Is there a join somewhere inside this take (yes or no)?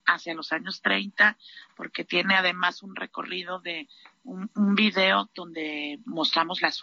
no